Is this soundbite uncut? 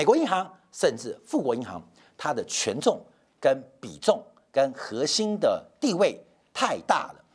yes; 0 cuts

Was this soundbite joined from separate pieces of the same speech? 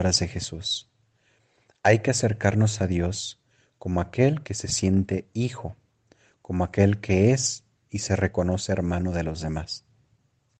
no; 0 cuts

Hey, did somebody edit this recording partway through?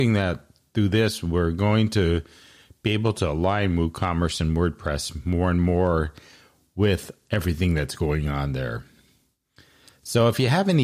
no; 0 cuts

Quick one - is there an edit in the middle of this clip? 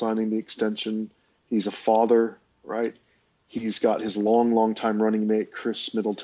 no; 0 cuts

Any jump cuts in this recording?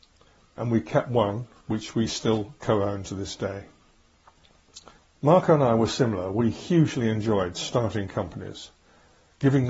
yes; 1 cut; at 5.0 s

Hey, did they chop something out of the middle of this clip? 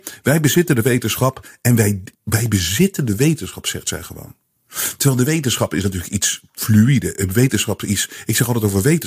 yes; 1 cut; at 2.1 s

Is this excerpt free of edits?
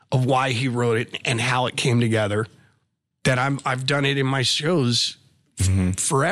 yes; 0 cuts

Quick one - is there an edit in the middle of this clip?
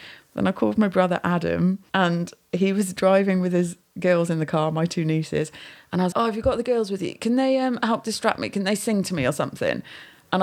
yes; 2 cuts; at 1.9 s, 6.1 s

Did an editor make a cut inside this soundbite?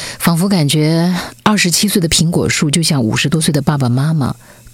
no; 0 cuts

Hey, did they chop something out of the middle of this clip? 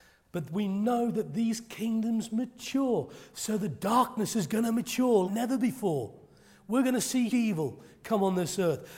yes; 2 cuts; at 5.3 s, 7.3 s

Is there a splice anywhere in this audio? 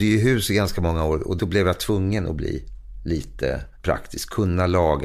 no; 0 cuts

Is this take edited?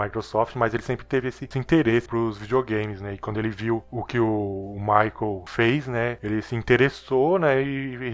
yes; 1 cut; at 2.1 s

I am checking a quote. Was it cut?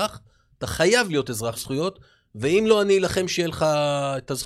yes; 1 cut; at 1.5 s

